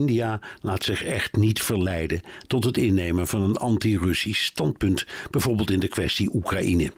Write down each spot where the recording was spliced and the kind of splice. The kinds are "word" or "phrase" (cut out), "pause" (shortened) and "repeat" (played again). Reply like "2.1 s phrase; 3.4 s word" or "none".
none